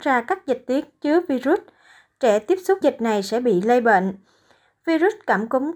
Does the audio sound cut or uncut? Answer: cut